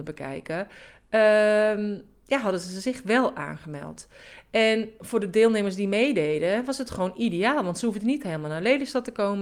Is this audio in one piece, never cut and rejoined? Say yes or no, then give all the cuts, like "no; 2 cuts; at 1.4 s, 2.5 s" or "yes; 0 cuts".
yes; 0 cuts